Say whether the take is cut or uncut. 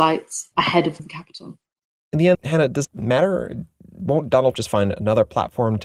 cut